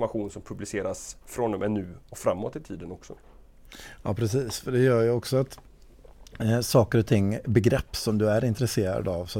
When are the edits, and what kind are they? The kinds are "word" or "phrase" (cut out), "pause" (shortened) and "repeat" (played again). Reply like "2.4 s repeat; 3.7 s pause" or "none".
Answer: none